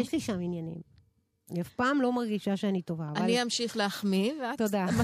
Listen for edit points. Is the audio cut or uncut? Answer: uncut